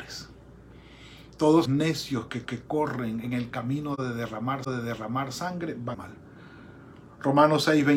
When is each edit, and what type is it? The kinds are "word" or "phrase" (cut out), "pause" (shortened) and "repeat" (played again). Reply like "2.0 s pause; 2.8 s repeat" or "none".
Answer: 1.7 s word; 2.5 s repeat; 4.6 s repeat; 5.9 s phrase